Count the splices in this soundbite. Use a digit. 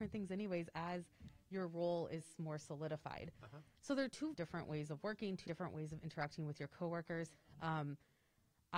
2